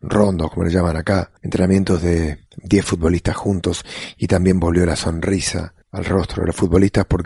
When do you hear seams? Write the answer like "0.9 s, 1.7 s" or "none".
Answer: 1.4 s, 2.5 s, 5.8 s